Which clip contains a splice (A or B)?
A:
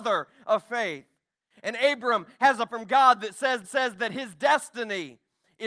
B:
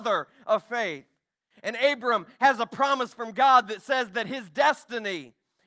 A